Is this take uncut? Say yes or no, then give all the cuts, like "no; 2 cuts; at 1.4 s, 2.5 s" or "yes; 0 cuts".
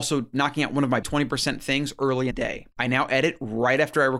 no; 3 cuts; at 1.0 s, 2.3 s, 2.7 s